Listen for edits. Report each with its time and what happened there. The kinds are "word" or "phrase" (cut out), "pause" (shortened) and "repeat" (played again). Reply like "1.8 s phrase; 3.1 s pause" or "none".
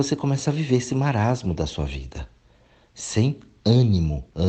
none